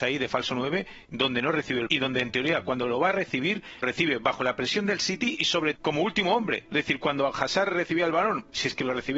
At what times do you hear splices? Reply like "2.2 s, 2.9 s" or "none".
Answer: 1.9 s, 3.8 s, 5.8 s

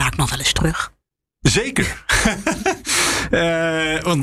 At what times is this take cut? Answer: none

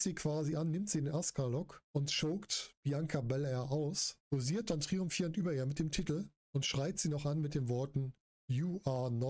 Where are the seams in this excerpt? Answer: 1.8 s, 4.2 s, 6.4 s

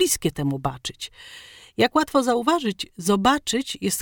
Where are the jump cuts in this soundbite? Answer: none

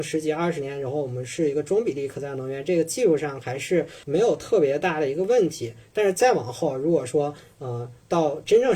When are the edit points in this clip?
4.0 s

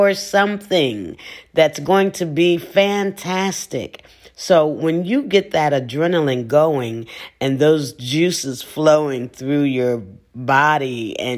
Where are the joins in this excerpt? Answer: none

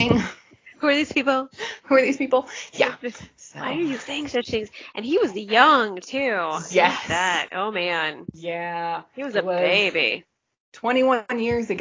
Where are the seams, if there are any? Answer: none

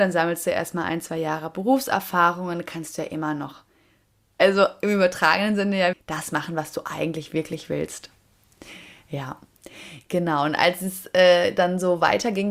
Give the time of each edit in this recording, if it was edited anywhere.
5.9 s

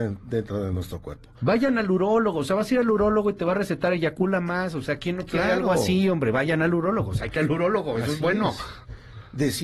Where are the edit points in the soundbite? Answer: 7.4 s

